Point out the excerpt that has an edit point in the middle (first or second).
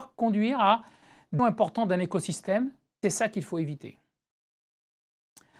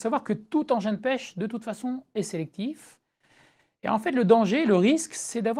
first